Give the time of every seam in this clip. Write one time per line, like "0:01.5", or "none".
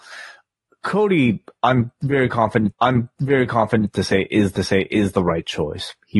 0:02.7
0:04.6